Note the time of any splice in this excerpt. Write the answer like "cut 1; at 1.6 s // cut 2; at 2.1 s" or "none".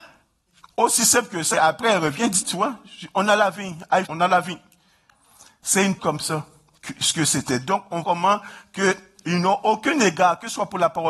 cut 1; at 1.5 s // cut 2; at 2.4 s // cut 3; at 4.0 s // cut 4; at 6.0 s // cut 5; at 8.0 s